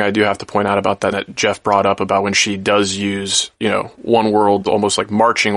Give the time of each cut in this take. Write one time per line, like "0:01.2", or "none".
0:01.1
0:04.7